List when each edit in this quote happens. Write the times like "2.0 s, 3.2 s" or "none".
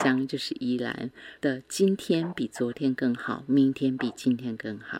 1.4 s